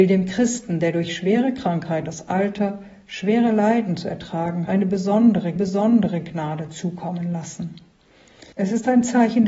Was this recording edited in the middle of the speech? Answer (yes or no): yes